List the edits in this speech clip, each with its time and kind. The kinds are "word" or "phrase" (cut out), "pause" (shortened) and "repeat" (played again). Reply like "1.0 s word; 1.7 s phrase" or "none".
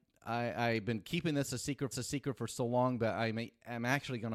1.9 s repeat